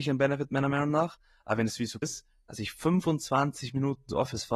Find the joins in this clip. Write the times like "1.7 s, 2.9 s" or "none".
2.0 s